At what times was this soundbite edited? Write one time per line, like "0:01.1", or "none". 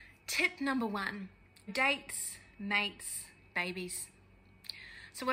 0:01.7
0:03.5